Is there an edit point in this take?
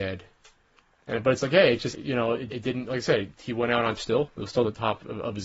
yes; 3 cuts; at 1.9 s, 2.5 s, 4.0 s

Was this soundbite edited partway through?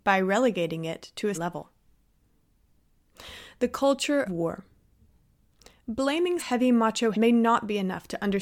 yes; 4 cuts; at 1.3 s, 4.3 s, 6.4 s, 7.1 s

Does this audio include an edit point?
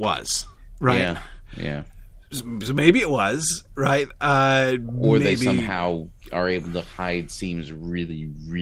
no; 0 cuts

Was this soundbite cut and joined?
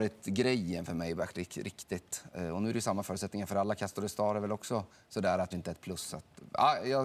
yes; 1 cut; at 5.5 s

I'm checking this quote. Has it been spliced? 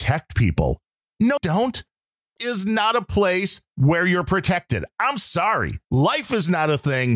yes; 4 cuts; at 1.4 s, 2.4 s, 3.7 s, 5.8 s

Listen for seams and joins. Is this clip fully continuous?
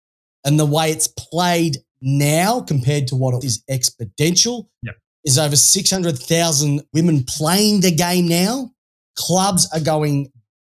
no; 2 cuts; at 3.4 s, 6.9 s

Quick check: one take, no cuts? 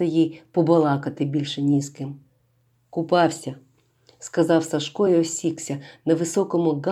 yes; 0 cuts

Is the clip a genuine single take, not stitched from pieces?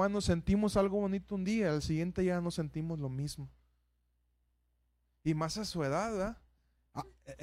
yes; 0 cuts

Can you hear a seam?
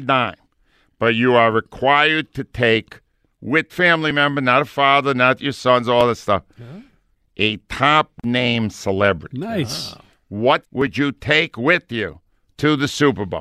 yes; 2 cuts; at 3.7 s, 10.6 s

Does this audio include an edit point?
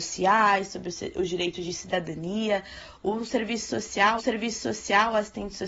yes; 1 cut; at 4.2 s

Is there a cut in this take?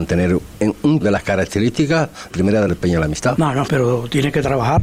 yes; 4 cuts; at 1.0 s, 2.3 s, 2.7 s, 3.7 s

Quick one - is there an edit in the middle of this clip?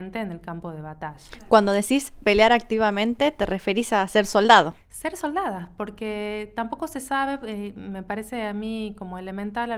no; 0 cuts

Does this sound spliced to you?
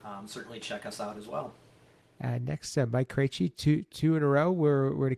no; 0 cuts

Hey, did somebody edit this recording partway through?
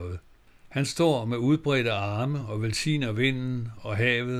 no; 0 cuts

